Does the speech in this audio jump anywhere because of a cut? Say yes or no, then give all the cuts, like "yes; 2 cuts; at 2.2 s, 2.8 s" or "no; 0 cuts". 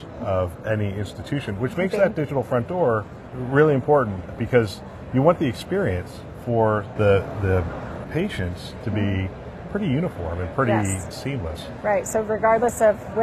no; 0 cuts